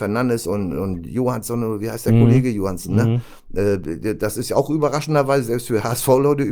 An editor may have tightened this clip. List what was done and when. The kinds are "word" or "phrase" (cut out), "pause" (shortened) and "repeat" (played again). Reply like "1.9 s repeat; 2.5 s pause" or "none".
none